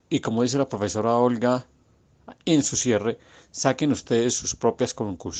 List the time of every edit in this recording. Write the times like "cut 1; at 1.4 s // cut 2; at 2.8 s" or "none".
none